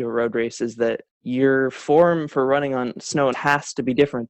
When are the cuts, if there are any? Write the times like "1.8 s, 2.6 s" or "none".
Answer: 1.1 s, 3.3 s